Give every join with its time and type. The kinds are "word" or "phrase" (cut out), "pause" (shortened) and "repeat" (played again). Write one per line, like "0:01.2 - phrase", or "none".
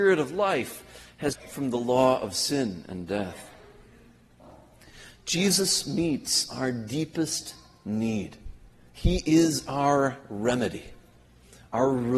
0:01.3 - phrase